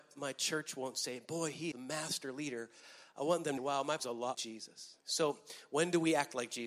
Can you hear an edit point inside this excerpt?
yes; 5 cuts; at 1.7 s, 3.6 s, 4.0 s, 4.3 s, 5.0 s

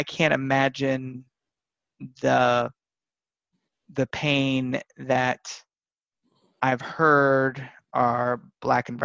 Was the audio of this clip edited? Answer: no; 0 cuts

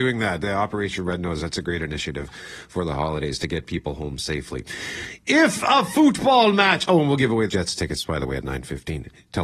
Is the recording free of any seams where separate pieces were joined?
no; 1 cut; at 7.5 s

